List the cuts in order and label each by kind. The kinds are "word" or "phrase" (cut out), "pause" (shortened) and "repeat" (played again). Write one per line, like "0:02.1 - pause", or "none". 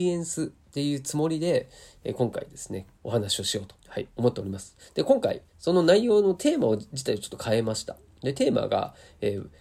0:02.9 - pause
0:03.8 - pause